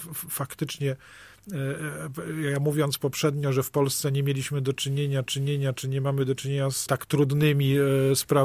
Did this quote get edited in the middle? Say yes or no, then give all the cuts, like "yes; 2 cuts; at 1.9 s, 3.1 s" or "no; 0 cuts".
yes; 1 cut; at 5.2 s